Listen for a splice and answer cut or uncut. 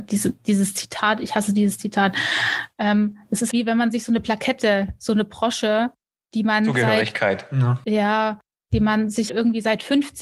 cut